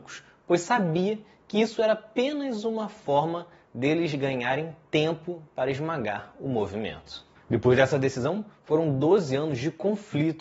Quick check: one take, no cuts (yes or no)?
no